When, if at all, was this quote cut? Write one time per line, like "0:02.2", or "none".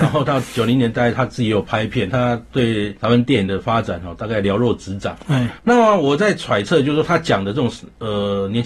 0:03.0